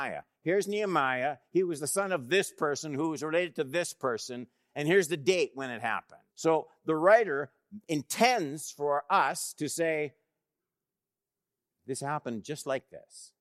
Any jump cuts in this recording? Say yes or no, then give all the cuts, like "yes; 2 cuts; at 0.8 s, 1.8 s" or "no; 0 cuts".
yes; 1 cut; at 6.3 s